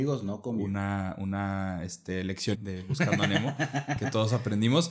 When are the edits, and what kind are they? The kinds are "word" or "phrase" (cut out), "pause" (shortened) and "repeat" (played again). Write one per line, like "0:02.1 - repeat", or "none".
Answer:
0:02.5 - word